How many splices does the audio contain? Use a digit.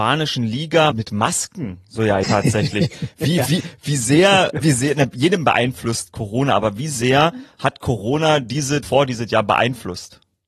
4